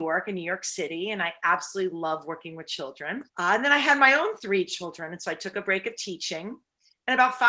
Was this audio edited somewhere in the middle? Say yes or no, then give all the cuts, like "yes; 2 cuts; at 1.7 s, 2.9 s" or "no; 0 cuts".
yes; 1 cut; at 3.3 s